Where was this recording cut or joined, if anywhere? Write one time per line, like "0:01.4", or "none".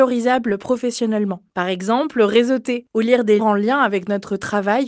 0:03.4